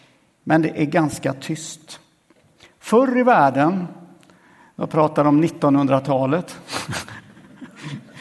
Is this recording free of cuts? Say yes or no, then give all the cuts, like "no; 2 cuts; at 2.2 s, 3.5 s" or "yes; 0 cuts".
yes; 0 cuts